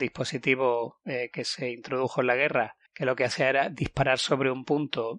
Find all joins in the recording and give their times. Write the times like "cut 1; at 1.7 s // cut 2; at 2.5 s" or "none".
cut 1; at 2.9 s